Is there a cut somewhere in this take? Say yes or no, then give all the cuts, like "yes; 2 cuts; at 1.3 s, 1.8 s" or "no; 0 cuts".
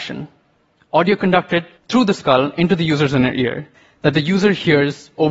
yes; 2 cuts; at 1.8 s, 3.7 s